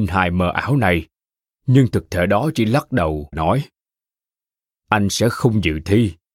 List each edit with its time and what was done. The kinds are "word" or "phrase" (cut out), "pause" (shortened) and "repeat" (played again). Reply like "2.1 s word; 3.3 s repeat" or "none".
3.3 s word